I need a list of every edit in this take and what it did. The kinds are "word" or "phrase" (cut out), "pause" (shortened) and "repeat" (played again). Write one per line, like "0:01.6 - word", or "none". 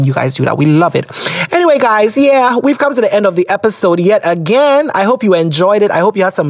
none